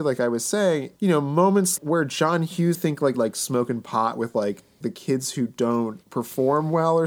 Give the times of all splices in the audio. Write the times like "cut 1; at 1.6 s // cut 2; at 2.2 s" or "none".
cut 1; at 1.0 s // cut 2; at 1.8 s // cut 3; at 2.7 s // cut 4; at 3.1 s // cut 5; at 4.8 s // cut 6; at 6.0 s